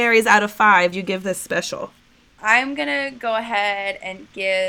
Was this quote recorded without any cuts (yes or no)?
no